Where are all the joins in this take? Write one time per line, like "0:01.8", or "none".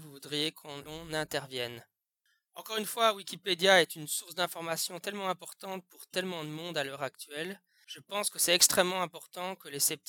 none